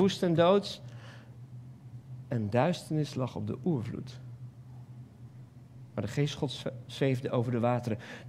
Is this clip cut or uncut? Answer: uncut